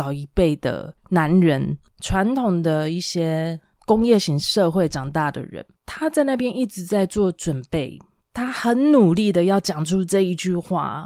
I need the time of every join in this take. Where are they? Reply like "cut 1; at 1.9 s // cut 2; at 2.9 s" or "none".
cut 1; at 1.9 s // cut 2; at 5.8 s // cut 3; at 8.2 s